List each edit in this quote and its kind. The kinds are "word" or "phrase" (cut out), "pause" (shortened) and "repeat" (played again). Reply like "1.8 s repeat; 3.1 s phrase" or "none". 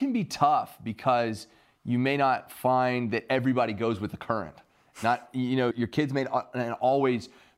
5.7 s word